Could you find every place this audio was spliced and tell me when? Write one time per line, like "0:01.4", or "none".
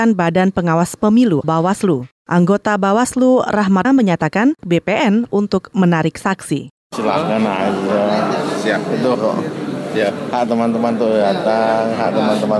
0:01.4
0:03.8
0:04.6
0:09.1

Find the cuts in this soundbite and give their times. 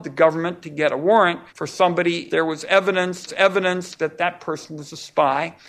0:01.5
0:02.3
0:03.3

